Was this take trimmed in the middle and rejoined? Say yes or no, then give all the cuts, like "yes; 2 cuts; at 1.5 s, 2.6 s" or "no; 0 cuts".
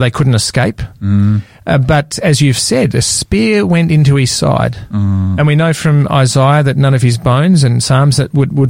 no; 0 cuts